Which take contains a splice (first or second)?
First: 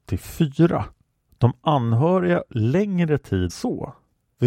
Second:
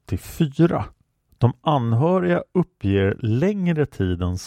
first